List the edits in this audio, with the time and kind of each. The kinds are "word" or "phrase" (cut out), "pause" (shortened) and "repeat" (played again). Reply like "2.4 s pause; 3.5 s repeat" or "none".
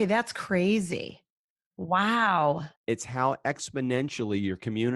2.8 s pause